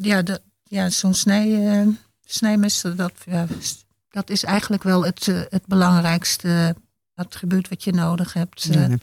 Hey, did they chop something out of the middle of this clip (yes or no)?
no